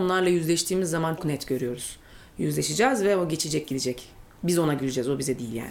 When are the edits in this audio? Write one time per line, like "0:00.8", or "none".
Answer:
0:01.2